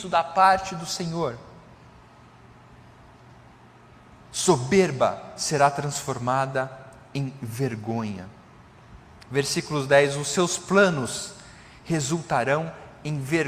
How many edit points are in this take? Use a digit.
0